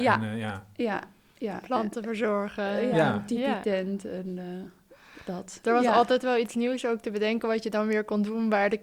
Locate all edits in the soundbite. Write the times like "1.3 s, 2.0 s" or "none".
none